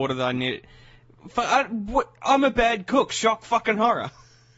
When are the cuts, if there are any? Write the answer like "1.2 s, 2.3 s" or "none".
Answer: none